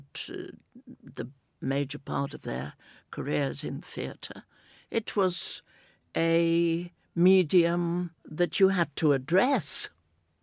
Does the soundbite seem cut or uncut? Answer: cut